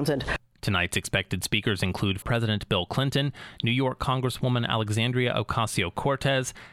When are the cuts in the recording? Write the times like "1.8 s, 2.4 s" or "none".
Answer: 2.2 s